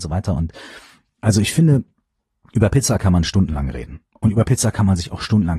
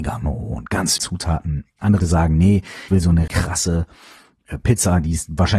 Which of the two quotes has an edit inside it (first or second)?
second